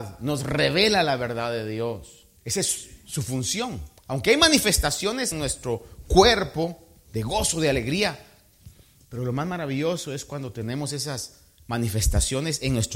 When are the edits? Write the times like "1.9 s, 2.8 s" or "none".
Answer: 2.4 s, 4.0 s, 5.3 s